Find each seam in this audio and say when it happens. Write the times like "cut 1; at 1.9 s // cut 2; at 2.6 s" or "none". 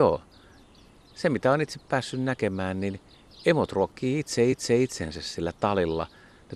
cut 1; at 4.5 s